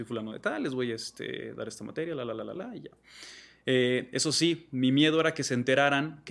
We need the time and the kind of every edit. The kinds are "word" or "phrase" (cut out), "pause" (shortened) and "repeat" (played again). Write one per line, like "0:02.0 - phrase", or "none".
0:02.6 - word